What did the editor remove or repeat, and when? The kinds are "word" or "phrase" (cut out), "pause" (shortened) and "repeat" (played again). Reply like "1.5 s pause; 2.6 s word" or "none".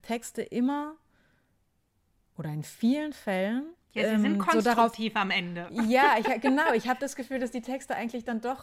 3.8 s pause